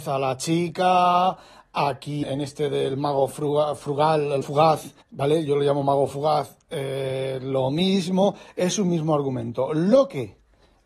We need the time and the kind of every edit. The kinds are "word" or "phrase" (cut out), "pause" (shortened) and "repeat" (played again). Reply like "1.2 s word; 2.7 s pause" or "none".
2.2 s word; 4.4 s word; 5.0 s pause